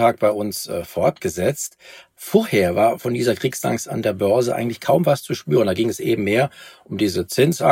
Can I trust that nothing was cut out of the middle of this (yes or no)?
yes